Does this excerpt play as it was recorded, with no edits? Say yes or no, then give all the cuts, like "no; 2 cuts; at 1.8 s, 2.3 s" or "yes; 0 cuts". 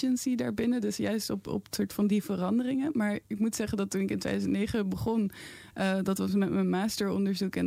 yes; 0 cuts